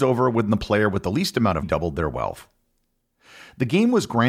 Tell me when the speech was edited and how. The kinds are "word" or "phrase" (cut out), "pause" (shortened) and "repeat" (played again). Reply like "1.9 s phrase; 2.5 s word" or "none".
1.6 s word